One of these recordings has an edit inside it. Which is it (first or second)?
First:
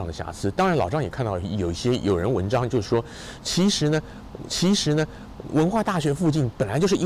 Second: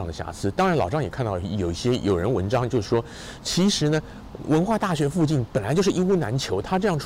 first